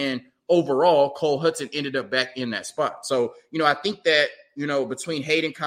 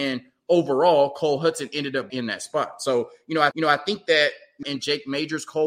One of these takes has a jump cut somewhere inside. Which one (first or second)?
second